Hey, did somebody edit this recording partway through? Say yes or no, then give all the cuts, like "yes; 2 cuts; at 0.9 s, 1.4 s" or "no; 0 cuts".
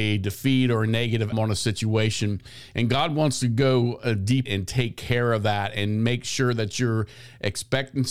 yes; 2 cuts; at 1.3 s, 4.5 s